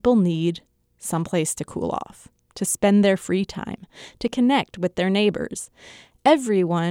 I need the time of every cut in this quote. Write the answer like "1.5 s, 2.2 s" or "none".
none